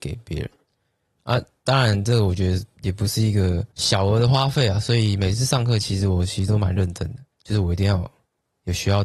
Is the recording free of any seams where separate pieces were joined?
no; 2 cuts; at 3.7 s, 7.3 s

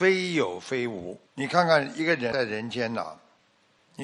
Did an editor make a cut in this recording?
yes; 1 cut; at 1.2 s

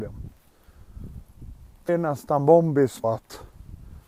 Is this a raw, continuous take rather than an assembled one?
no; 2 cuts; at 1.9 s, 3.0 s

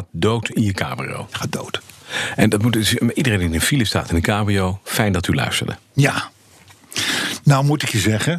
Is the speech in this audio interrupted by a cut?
no; 0 cuts

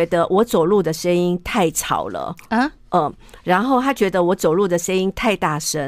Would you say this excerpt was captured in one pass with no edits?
yes; 0 cuts

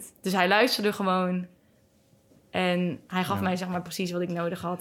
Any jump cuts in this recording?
no; 0 cuts

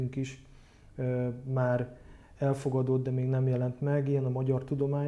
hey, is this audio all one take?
yes; 0 cuts

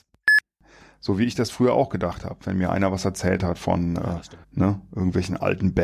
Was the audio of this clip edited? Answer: yes; 1 cut; at 4.4 s

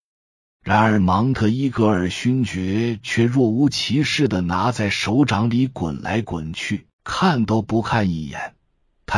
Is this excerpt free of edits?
no; 1 cut; at 6.9 s

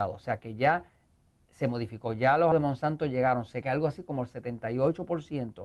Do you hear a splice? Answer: yes; 2 cuts; at 2.5 s, 3.6 s

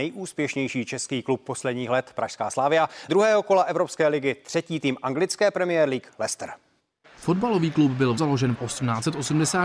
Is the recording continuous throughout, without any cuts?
no; 4 cuts; at 3.1 s, 6.8 s, 8.2 s, 8.5 s

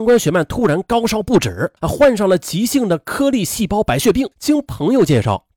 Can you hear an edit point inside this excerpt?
yes; 2 cuts; at 1.8 s, 4.3 s

